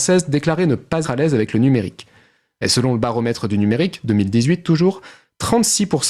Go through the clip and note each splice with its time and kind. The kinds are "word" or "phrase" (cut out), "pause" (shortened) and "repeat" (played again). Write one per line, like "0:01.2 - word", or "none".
0:01.0 - word